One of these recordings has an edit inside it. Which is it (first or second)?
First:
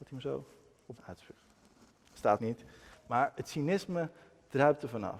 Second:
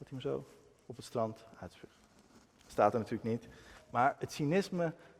first